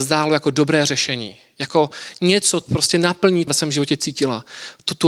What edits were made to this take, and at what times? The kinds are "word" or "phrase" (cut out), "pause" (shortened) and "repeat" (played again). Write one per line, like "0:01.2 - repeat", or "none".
0:02.6 - word
0:03.5 - phrase